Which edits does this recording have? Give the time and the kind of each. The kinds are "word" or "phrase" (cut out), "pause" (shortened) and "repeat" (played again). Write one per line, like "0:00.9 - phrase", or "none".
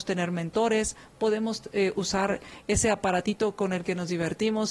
none

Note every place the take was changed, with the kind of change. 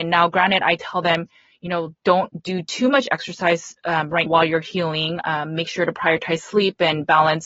0:04.3 - word

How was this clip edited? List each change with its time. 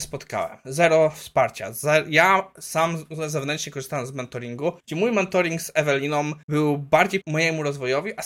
0:04.8 - pause
0:06.4 - pause
0:07.2 - word

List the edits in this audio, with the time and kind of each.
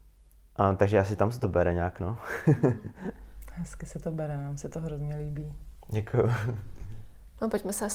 none

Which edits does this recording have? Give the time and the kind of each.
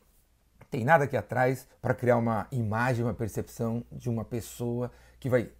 0:01.7 - pause

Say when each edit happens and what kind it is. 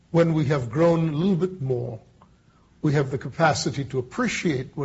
none

